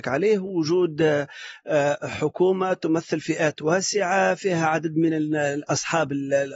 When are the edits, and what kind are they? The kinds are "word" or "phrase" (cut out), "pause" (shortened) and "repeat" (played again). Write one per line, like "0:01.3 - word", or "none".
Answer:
none

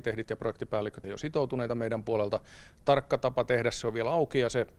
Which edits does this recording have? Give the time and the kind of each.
0:01.0 - word

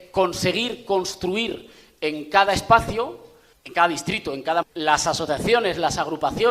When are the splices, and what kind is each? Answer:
0:03.5 - word
0:04.6 - word

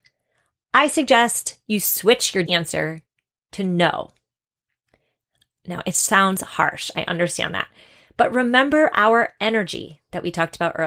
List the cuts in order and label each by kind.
0:02.5 - word

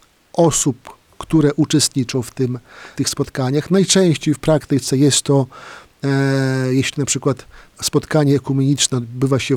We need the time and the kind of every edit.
0:03.0 - word

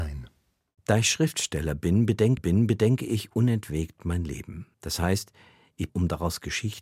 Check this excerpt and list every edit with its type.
0:02.4 - repeat
0:04.7 - pause
0:05.9 - phrase

